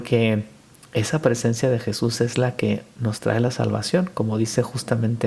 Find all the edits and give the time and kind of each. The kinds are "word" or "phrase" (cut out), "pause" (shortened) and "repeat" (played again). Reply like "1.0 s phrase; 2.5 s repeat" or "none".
none